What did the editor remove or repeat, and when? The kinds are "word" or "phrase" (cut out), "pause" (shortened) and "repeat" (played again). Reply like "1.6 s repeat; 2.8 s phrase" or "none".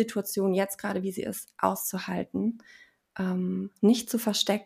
none